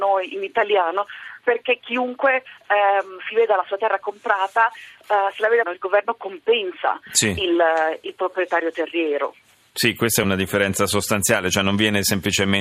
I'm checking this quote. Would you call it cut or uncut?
cut